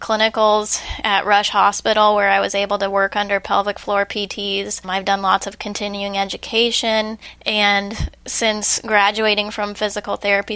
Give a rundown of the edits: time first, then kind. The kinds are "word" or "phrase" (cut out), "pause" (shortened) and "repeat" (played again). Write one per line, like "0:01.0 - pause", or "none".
none